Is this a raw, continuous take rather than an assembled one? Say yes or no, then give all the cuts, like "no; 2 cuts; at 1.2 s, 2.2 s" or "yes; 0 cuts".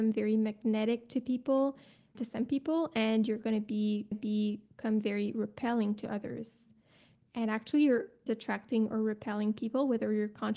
no; 3 cuts; at 2.1 s, 4.1 s, 8.3 s